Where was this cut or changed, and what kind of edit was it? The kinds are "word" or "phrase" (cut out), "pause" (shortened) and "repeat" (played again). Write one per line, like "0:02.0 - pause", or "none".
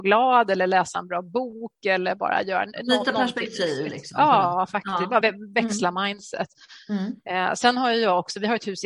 0:05.2 - word

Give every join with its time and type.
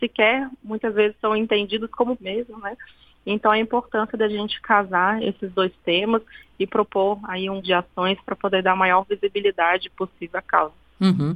0:02.2 - word
0:07.6 - word

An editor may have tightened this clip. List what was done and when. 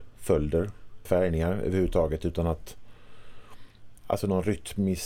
0:01.1 - word
0:04.0 - word

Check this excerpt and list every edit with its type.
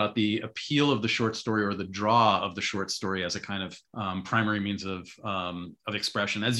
0:03.8 - pause

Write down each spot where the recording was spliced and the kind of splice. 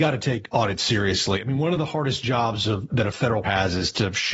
0:02.9 - word
0:03.4 - word

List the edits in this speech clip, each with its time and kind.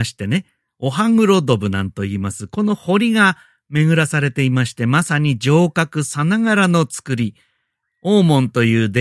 none

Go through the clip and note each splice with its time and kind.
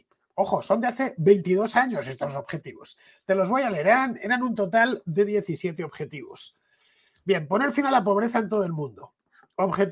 none

